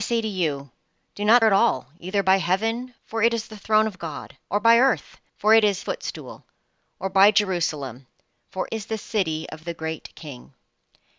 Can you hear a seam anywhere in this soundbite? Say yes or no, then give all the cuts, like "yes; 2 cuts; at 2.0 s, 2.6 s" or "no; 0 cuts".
yes; 6 cuts; at 1.4 s, 3.0 s, 4.4 s, 5.3 s, 5.8 s, 8.7 s